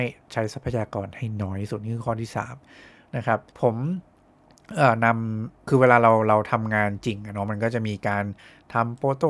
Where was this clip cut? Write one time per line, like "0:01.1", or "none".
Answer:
0:03.5
0:05.6